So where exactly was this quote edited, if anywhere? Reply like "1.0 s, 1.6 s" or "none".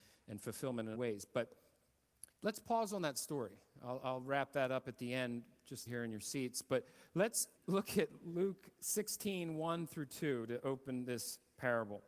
0.9 s, 2.3 s, 5.9 s, 7.6 s

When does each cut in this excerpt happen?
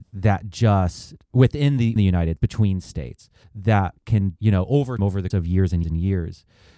2.0 s, 2.4 s, 3.4 s, 4.4 s, 5.0 s, 5.3 s, 5.8 s

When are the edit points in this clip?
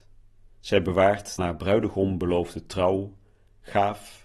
1.4 s

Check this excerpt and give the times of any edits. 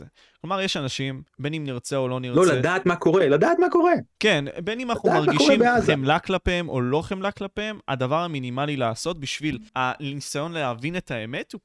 1.3 s, 9.7 s

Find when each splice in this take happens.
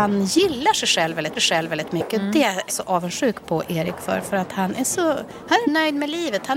1.4 s, 2.7 s, 5.6 s

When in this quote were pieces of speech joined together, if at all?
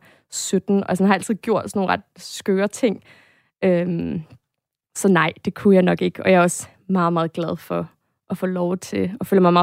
none

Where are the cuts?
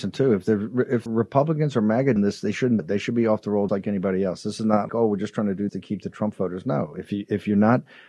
1.1 s, 2.2 s, 2.8 s, 3.7 s, 4.9 s, 5.7 s

